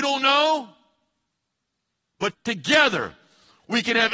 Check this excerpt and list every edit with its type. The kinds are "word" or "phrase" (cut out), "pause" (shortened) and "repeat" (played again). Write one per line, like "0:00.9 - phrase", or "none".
0:02.3 - word